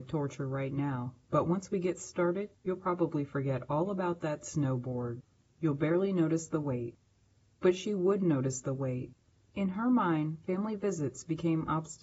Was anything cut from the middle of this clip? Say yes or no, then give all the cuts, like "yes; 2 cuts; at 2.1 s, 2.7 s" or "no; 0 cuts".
no; 0 cuts